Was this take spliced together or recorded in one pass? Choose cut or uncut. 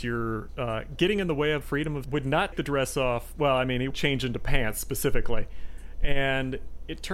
cut